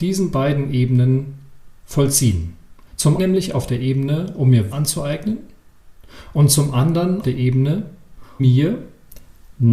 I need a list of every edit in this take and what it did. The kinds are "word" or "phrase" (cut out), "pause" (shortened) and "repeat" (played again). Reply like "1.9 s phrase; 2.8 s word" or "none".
3.2 s word; 4.7 s word; 7.2 s word; 8.4 s word